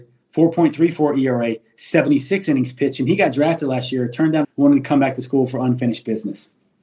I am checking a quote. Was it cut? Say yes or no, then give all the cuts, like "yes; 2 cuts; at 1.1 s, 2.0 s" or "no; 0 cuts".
yes; 1 cut; at 4.4 s